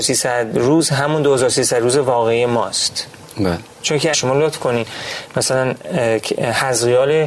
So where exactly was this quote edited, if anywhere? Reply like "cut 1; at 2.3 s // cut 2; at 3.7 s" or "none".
cut 1; at 4.1 s